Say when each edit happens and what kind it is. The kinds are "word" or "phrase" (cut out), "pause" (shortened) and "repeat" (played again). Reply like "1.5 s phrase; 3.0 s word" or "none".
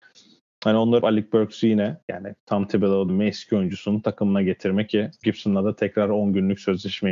1.0 s word; 2.0 s pause; 3.1 s word; 5.2 s word